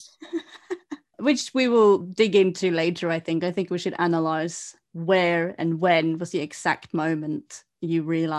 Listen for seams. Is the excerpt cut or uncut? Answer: uncut